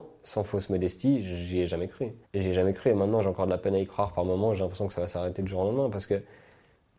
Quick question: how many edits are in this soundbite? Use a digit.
1